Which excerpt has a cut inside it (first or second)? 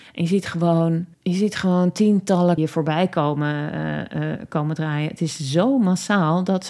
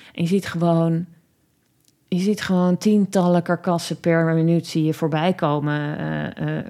first